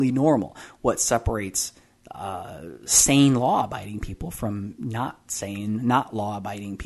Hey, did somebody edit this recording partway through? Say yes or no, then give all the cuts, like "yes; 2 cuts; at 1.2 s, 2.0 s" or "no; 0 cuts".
no; 0 cuts